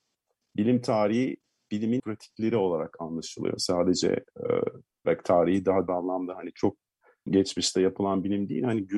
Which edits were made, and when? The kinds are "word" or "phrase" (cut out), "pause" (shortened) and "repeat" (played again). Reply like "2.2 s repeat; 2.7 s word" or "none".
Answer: 2.0 s word; 5.0 s word; 5.9 s word; 7.3 s word